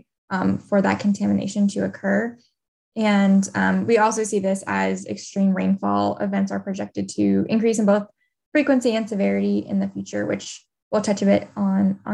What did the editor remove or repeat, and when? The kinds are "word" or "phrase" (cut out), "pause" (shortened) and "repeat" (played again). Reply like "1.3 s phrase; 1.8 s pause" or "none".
none